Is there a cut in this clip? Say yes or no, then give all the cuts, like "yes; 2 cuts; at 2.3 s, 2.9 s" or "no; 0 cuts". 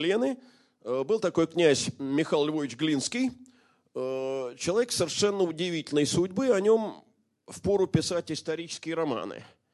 no; 0 cuts